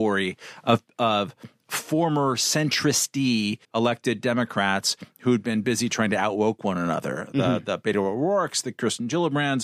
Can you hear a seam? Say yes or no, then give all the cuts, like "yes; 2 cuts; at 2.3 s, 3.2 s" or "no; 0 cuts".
yes; 1 cut; at 3.6 s